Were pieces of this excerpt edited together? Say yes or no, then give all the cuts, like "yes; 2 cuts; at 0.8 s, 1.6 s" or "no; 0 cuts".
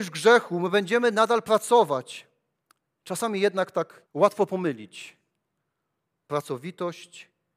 yes; 2 cuts; at 2.6 s, 4.1 s